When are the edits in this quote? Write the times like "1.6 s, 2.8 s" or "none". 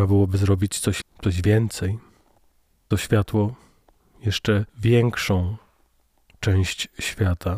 1.0 s, 2.9 s, 4.7 s